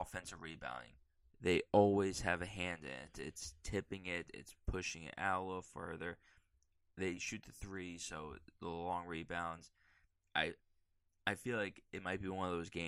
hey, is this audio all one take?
yes; 0 cuts

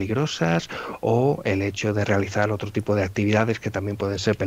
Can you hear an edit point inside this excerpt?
no; 0 cuts

